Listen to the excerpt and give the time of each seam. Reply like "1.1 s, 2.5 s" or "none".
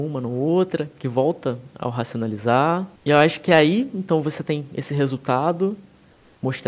3.0 s

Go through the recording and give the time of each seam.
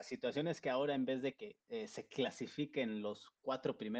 1.6 s

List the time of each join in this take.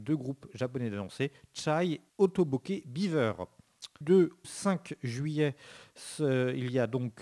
2.1 s, 4.0 s, 4.4 s

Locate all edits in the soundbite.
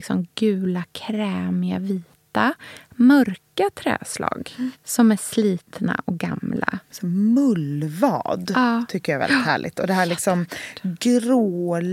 none

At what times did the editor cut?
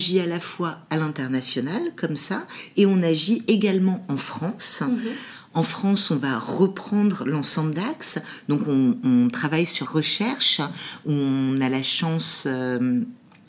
7.7 s, 9.8 s

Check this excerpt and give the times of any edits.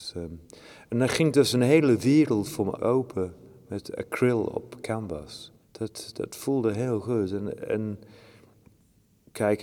2.8 s, 5.6 s

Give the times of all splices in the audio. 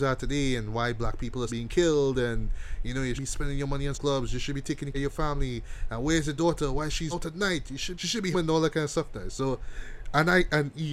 1.5 s, 3.2 s, 3.9 s, 4.9 s, 7.1 s, 7.9 s, 8.3 s

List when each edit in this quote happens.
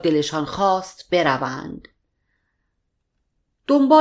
none

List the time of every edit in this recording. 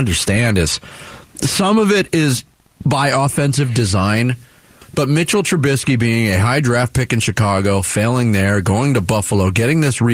none

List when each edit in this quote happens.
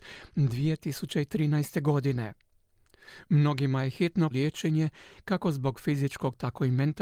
4.3 s

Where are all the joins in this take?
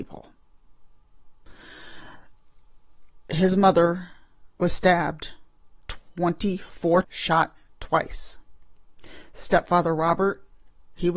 7.0 s

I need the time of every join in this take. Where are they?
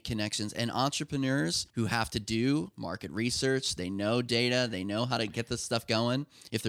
1.7 s

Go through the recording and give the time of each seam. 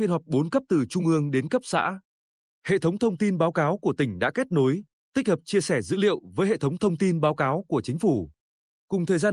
none

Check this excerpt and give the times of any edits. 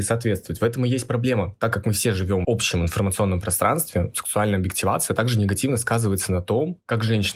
2.4 s

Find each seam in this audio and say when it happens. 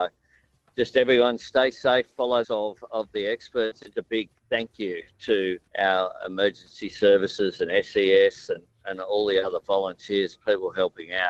2.4 s, 3.9 s, 4.4 s, 5.7 s

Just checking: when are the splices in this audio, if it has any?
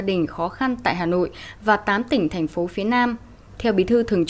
none

